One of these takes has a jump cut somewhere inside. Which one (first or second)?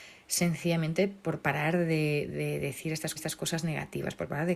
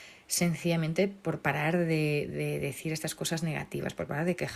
first